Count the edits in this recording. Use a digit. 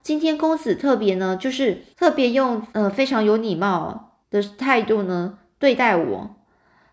3